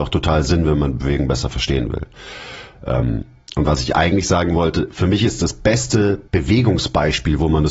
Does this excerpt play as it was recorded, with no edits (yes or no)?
no